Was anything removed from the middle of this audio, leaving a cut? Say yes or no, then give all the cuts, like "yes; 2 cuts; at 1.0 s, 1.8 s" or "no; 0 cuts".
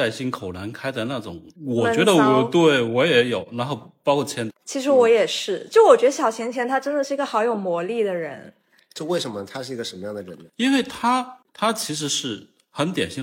yes; 3 cuts; at 1.6 s, 4.5 s, 10.5 s